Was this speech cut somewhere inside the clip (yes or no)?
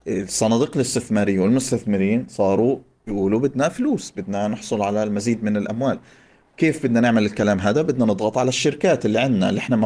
no